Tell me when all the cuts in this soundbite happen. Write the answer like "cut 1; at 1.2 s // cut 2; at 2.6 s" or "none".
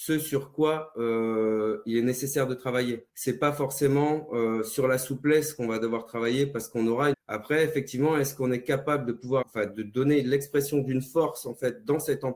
cut 1; at 3.1 s // cut 2; at 7.1 s // cut 3; at 9.4 s